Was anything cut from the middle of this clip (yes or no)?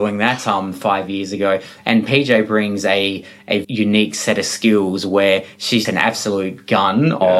yes